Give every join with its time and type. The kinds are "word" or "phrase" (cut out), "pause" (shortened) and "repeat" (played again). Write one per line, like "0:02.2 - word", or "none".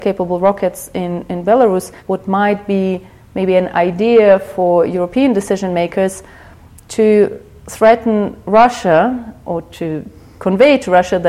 0:02.0 - pause